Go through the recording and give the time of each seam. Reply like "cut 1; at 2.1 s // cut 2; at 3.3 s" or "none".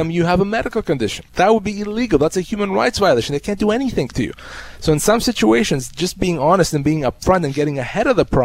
cut 1; at 1.3 s